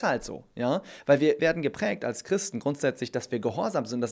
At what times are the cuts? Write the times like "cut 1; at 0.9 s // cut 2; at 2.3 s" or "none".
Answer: cut 1; at 1.4 s